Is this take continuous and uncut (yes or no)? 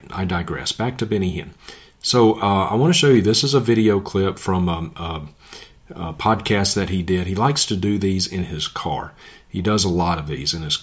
yes